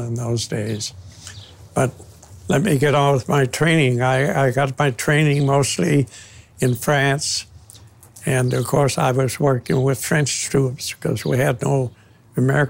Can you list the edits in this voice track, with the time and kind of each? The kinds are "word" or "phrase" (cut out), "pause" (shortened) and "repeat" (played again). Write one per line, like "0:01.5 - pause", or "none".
none